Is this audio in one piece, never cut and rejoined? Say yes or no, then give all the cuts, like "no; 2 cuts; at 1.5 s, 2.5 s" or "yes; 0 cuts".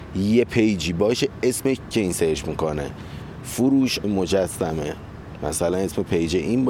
no; 2 cuts; at 1.9 s, 4.0 s